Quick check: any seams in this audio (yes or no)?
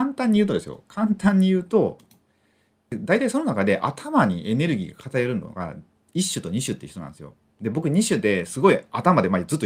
no